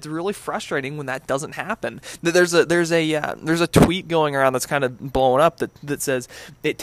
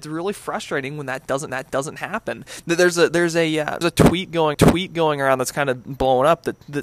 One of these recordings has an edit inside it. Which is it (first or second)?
second